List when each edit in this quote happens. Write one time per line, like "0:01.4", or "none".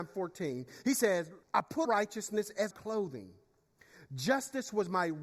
0:01.4
0:01.9
0:02.7